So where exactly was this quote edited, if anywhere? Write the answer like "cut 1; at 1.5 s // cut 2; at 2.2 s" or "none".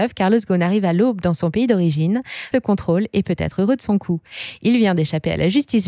cut 1; at 2.5 s

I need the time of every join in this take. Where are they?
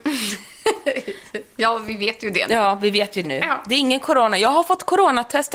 cut 1; at 3.2 s

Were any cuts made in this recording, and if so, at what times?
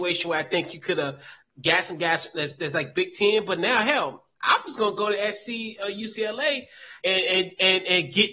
cut 1; at 7.0 s

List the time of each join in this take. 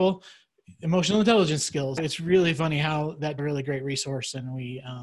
cut 1; at 2.0 s // cut 2; at 3.4 s

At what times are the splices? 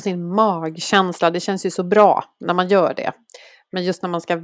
none

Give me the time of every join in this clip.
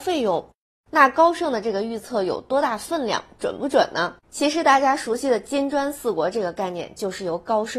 cut 1; at 4.2 s

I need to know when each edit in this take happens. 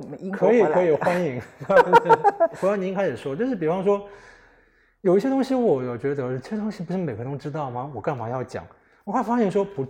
none

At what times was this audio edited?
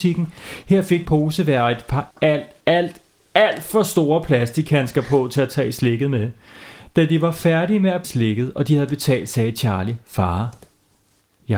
cut 1; at 1.1 s // cut 2; at 2.1 s // cut 3; at 2.6 s // cut 4; at 8.0 s

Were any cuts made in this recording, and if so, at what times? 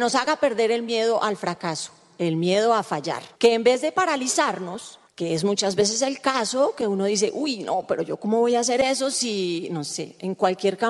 cut 1; at 3.3 s

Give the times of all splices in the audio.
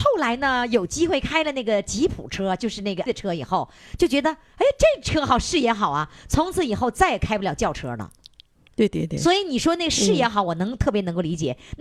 cut 1; at 3.1 s

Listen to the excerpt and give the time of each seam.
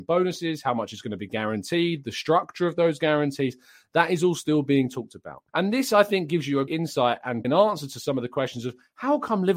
cut 1; at 5.5 s // cut 2; at 6.7 s // cut 3; at 7.4 s

